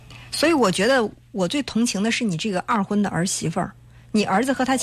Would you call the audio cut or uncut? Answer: uncut